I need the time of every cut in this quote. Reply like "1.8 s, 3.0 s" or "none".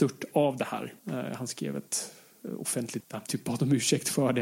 1.0 s, 3.0 s